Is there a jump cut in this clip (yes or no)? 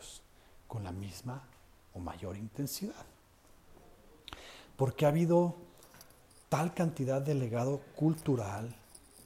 no